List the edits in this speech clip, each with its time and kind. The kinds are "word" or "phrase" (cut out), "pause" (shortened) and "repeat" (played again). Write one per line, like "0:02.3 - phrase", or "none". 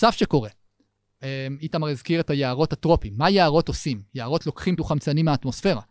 0:04.8 - word